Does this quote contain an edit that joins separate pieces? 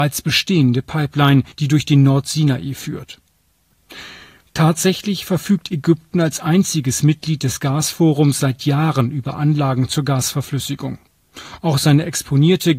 yes; 1 cut; at 1.5 s

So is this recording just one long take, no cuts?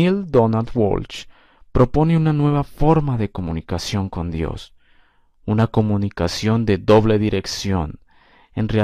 yes; 0 cuts

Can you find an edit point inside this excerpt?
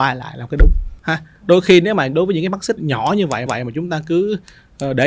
yes; 3 cuts; at 1.0 s, 2.8 s, 3.5 s

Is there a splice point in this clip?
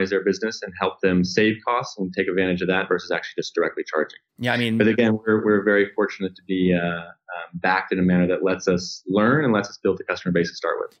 no; 0 cuts

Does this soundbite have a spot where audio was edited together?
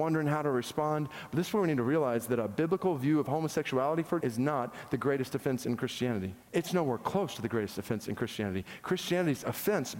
yes; 2 cuts; at 4.2 s, 6.4 s

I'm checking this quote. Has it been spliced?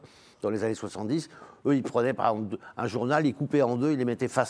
no; 0 cuts

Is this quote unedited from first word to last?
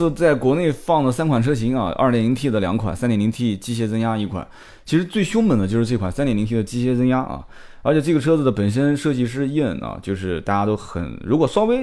yes; 0 cuts

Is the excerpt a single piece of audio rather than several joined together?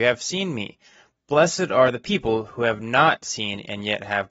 yes; 0 cuts

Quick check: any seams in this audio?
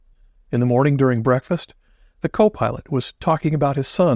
no; 0 cuts

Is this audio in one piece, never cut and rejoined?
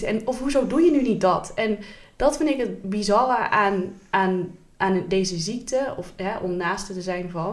yes; 0 cuts

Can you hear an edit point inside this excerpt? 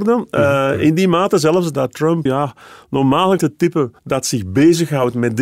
yes; 3 cuts; at 2.3 s, 3.4 s, 4.0 s

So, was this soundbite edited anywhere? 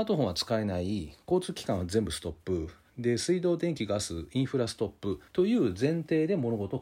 yes; 1 cut; at 5.3 s

